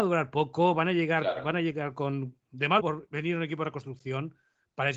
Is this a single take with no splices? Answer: no; 1 cut; at 2.8 s

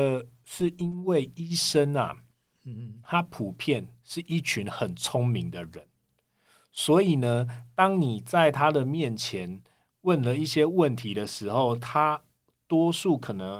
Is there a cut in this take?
no; 0 cuts

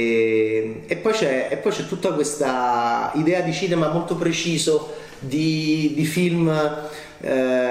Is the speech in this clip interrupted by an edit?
no; 0 cuts

